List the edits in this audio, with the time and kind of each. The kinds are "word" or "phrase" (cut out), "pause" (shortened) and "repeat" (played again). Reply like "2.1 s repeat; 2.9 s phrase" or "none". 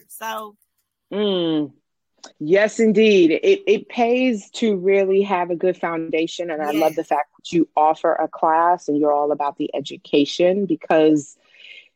2.3 s pause